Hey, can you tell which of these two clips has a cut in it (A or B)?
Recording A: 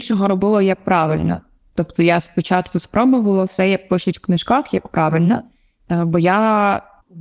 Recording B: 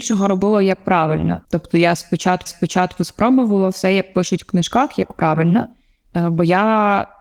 B